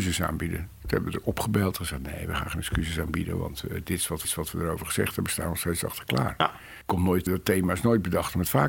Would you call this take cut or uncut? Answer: cut